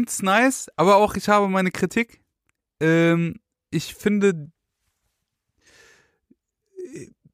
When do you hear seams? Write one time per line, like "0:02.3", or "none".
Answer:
none